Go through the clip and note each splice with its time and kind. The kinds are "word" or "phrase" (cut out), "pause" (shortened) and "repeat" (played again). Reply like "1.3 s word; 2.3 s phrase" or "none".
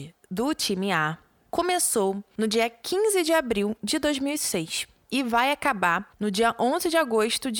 none